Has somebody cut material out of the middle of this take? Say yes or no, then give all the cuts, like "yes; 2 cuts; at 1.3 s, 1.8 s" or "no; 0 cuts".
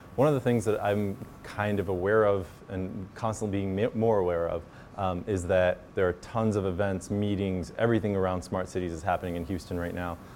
yes; 1 cut; at 5.9 s